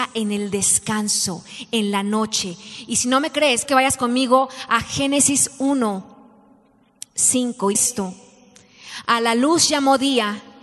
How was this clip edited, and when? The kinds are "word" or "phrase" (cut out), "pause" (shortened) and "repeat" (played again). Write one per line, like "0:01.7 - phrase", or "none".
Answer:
0:03.6 - word
0:07.7 - word